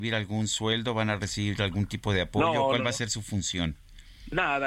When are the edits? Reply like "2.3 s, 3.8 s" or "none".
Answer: none